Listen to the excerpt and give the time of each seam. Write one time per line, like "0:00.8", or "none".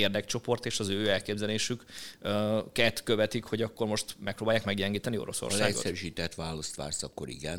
none